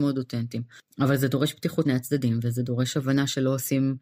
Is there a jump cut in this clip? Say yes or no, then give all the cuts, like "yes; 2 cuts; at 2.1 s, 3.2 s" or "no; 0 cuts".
yes; 1 cut; at 1.8 s